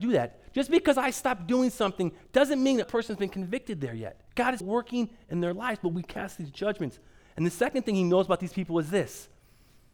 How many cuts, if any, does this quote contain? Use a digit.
3